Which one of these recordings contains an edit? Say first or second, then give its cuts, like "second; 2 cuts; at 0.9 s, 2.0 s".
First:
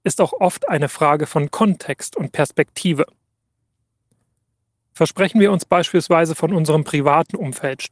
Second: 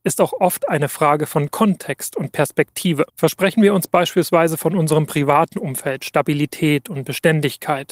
second; 1 cut; at 3.1 s